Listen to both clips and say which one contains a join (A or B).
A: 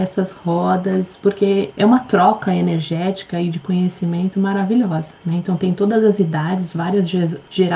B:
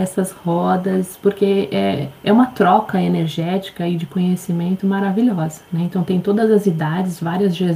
A